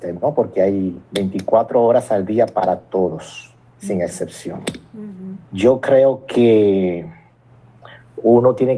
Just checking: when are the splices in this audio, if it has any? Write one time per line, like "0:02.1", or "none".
0:05.4

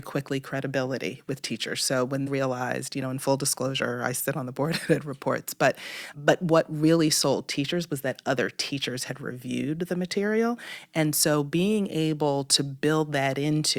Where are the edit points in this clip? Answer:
0:02.3
0:06.1

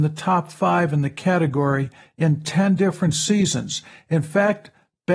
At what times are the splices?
none

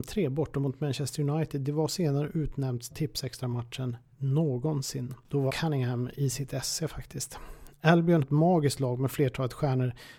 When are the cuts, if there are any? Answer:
0:01.9
0:02.9
0:05.5
0:08.2

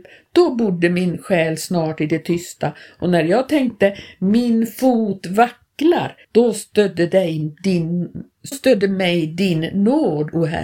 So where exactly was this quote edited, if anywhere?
0:06.2
0:08.5

